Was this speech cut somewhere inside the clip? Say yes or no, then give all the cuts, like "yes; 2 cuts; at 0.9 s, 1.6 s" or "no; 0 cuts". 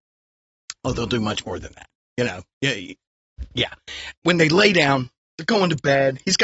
yes; 1 cut; at 4.1 s